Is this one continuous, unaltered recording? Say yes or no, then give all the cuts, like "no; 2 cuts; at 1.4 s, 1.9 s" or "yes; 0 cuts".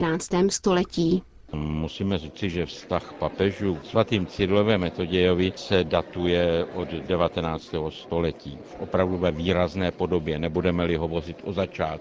yes; 0 cuts